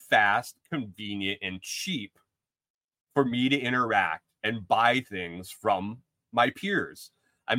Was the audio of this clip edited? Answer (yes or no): no